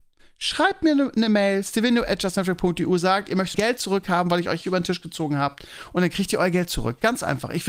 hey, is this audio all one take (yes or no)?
no